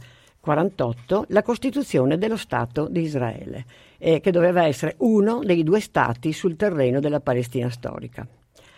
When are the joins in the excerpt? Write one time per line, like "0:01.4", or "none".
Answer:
none